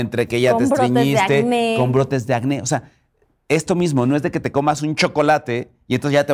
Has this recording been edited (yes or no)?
no